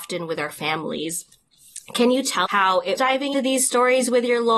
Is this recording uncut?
no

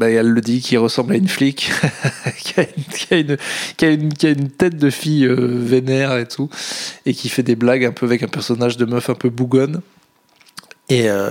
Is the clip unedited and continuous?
yes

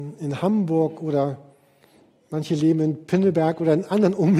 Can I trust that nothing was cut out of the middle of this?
yes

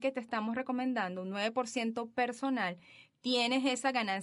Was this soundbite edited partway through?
no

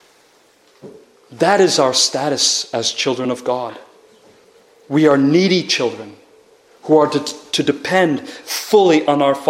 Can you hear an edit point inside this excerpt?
no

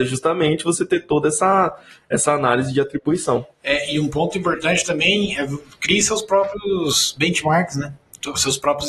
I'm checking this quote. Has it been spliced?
no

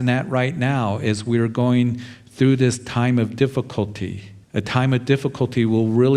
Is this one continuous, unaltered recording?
no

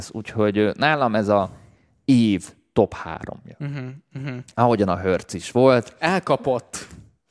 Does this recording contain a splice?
no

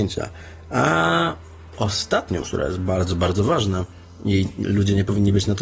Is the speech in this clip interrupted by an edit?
yes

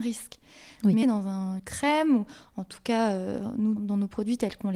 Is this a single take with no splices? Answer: no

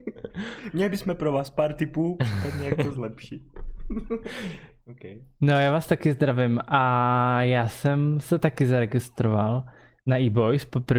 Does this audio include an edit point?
no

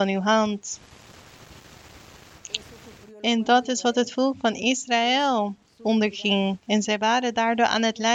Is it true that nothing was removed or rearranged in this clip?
yes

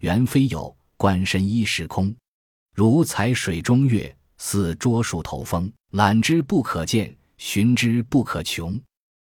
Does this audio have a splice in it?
yes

